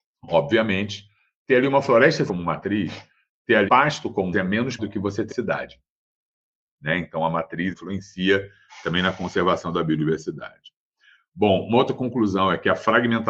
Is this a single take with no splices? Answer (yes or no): no